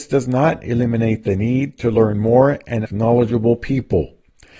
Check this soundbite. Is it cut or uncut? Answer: cut